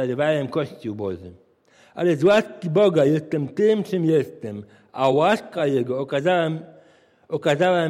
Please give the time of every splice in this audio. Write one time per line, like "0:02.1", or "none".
none